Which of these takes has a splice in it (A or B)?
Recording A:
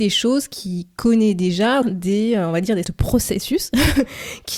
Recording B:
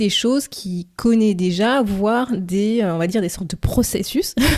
A